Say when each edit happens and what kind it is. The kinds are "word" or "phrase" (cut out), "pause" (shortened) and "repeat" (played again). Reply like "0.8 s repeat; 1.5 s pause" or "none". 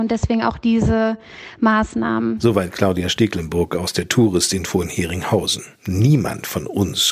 5.7 s pause